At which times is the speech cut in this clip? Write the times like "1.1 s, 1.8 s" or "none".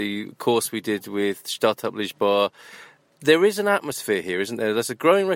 none